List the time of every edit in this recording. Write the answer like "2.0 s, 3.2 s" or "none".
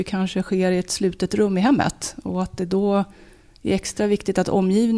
none